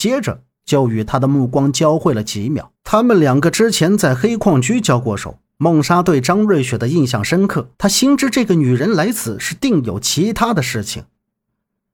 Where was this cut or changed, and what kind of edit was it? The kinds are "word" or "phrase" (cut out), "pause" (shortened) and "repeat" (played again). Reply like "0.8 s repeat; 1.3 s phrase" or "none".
2.8 s pause; 5.5 s pause; 7.7 s pause

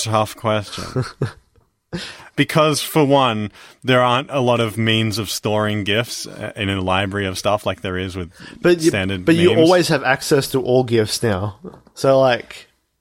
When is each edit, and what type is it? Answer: none

